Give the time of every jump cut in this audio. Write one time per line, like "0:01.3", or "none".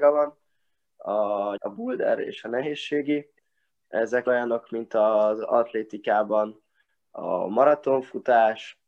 0:01.6
0:04.3